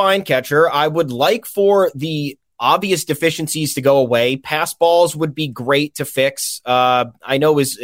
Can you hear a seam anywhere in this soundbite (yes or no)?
no